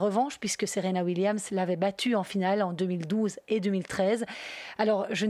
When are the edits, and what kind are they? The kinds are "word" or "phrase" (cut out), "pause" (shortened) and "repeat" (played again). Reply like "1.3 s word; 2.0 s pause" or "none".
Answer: none